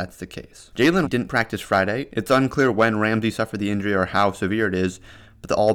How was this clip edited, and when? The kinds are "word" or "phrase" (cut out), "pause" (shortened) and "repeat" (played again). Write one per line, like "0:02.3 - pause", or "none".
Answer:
0:01.0 - word